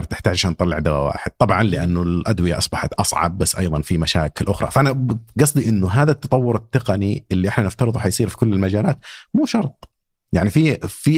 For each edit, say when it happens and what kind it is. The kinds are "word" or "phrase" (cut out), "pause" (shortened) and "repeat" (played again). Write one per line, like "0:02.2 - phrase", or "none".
none